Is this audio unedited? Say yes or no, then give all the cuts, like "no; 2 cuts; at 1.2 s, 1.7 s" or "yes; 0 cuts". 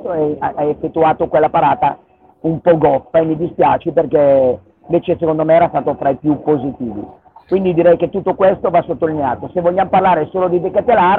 yes; 0 cuts